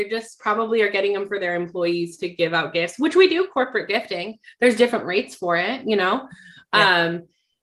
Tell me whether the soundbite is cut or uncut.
uncut